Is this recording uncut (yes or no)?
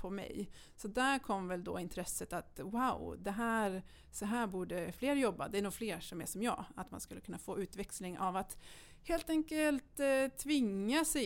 yes